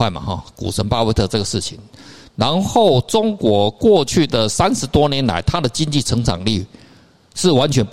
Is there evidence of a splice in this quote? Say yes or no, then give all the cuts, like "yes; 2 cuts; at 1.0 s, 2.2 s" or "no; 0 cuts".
no; 0 cuts